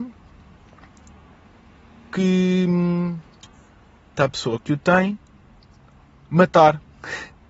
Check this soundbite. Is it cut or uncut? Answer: cut